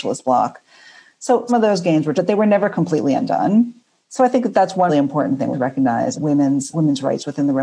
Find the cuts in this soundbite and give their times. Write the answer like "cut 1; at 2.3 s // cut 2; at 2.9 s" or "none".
cut 1; at 1.5 s // cut 2; at 2.1 s // cut 3; at 4.9 s // cut 4; at 5.5 s // cut 5; at 6.1 s // cut 6; at 6.7 s